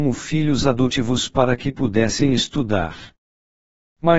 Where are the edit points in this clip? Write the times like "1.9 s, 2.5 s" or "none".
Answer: none